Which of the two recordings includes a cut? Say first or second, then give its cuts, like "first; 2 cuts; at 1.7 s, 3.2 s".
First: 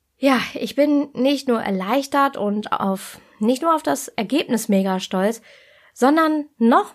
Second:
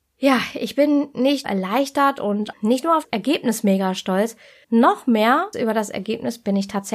second; 5 cuts; at 1.4 s, 2.5 s, 3.0 s, 4.6 s, 5.5 s